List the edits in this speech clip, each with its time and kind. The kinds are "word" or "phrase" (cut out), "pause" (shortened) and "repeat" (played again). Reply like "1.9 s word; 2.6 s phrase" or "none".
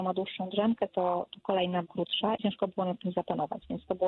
1.3 s word; 1.8 s phrase; 2.4 s word